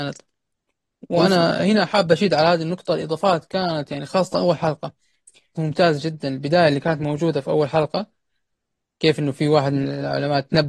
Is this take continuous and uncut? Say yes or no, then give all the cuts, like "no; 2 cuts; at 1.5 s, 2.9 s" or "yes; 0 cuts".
no; 1 cut; at 5.6 s